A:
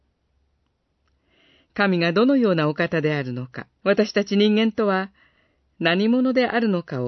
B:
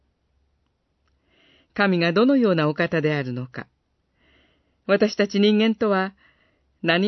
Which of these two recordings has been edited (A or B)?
A